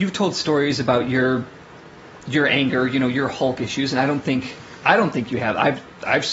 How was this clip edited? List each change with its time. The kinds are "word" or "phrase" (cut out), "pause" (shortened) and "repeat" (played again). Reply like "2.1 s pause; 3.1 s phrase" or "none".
none